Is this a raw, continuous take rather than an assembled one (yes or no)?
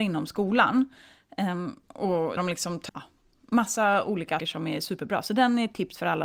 no